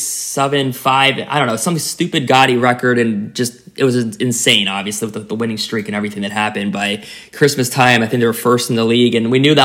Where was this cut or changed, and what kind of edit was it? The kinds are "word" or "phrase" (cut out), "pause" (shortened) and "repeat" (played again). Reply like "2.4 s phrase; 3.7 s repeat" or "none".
none